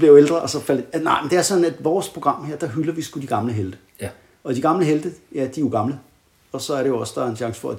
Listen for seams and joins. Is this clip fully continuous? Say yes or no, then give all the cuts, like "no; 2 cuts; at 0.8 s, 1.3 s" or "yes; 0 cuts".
yes; 0 cuts